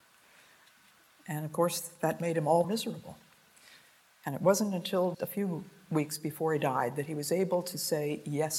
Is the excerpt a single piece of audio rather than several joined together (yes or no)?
no